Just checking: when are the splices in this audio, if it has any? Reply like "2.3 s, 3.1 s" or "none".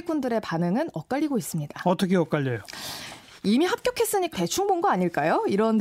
4.3 s